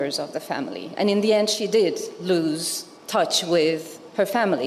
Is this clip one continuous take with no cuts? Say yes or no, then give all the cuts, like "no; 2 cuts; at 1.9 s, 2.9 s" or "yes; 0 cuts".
no; 1 cut; at 3.0 s